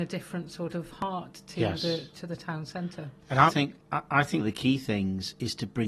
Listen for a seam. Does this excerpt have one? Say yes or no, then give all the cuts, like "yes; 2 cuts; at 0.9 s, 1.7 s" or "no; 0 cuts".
yes; 3 cuts; at 3.5 s, 3.8 s, 4.4 s